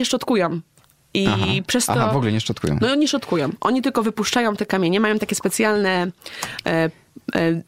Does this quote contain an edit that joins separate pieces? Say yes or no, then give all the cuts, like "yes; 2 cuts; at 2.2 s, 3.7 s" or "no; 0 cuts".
no; 0 cuts